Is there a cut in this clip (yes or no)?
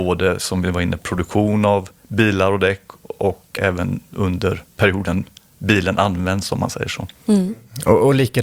yes